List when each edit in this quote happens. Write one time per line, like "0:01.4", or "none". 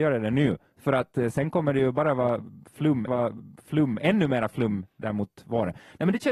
0:03.1